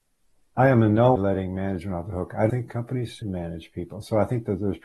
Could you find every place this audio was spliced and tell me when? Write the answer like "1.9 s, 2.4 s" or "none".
1.2 s, 2.5 s, 3.2 s

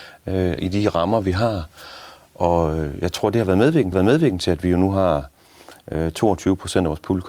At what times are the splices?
3.9 s

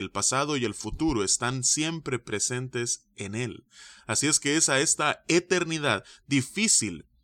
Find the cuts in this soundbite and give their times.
none

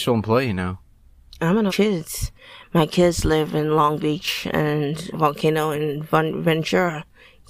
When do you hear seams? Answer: 1.7 s, 5.1 s

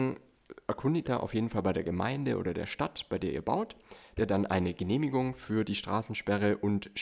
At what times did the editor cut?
1.0 s, 4.2 s

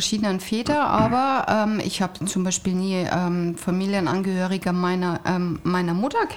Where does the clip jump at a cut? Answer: none

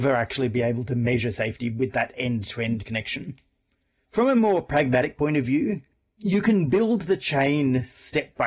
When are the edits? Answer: none

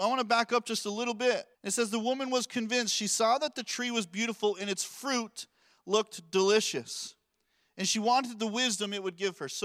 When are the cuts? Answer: 1.5 s

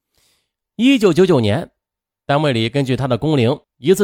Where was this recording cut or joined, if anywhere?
none

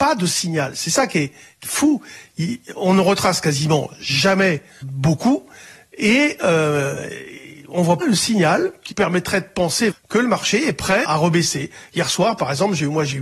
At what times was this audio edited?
1.6 s, 4.8 s, 8.0 s, 8.9 s, 9.9 s, 11.0 s

